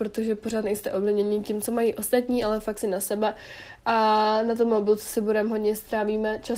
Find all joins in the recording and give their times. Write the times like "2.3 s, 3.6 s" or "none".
2.8 s